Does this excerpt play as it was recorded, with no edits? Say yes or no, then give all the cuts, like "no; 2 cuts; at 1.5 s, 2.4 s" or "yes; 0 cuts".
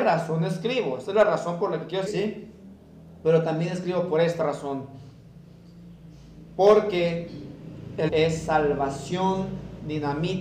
no; 3 cuts; at 2.1 s, 4.4 s, 8.1 s